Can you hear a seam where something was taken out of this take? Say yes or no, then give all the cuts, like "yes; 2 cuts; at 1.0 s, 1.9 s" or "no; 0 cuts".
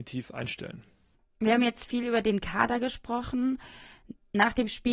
no; 0 cuts